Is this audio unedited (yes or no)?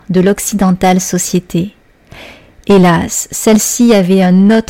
yes